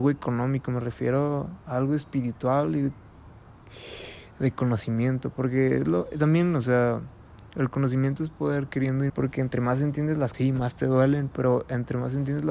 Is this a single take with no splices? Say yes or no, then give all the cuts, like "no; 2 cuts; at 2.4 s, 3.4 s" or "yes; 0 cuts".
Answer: no; 2 cuts; at 9.1 s, 10.3 s